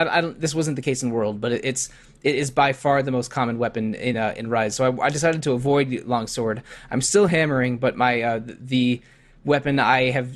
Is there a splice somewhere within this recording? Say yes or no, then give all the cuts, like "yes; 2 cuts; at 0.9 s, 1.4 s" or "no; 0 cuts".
no; 0 cuts